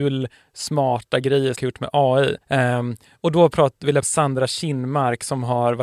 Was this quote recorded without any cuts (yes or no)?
no